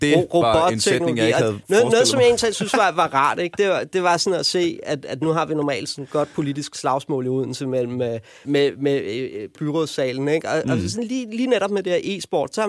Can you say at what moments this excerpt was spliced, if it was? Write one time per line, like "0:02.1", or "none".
0:08.4
0:09.6